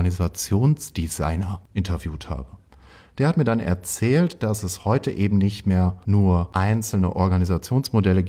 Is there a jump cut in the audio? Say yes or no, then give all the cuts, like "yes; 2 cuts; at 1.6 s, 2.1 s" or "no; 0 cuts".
no; 0 cuts